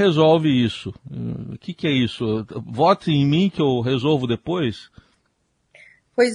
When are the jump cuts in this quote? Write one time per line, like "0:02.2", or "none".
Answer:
none